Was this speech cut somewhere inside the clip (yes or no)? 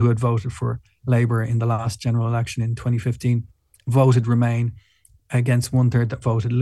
no